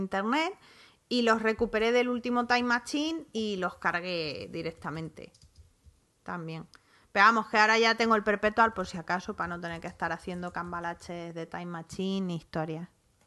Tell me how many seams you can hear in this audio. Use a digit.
0